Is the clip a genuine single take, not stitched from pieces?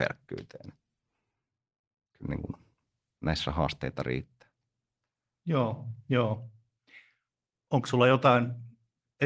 yes; 0 cuts

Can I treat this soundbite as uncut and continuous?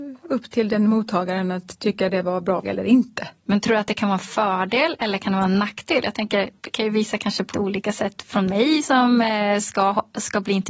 no; 4 cuts; at 2.6 s, 3.4 s, 6.6 s, 7.5 s

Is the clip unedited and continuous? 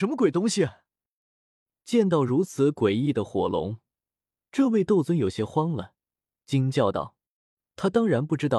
yes; 0 cuts

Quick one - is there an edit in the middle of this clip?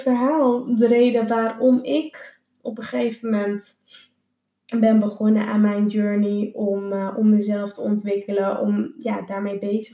no; 0 cuts

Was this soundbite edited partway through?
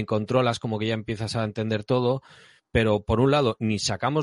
no; 0 cuts

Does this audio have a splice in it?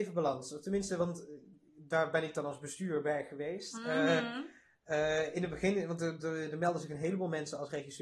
no; 0 cuts

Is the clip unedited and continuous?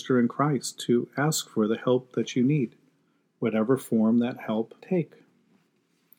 no; 1 cut; at 4.8 s

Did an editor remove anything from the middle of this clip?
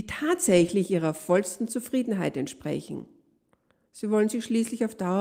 no; 0 cuts

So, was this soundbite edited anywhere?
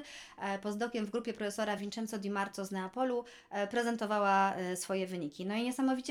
no; 0 cuts

